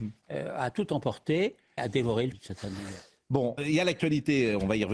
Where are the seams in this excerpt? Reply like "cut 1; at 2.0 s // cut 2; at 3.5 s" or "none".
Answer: cut 1; at 1.8 s // cut 2; at 2.3 s // cut 3; at 3.6 s